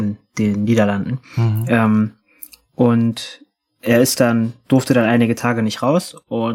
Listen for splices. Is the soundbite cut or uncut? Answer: uncut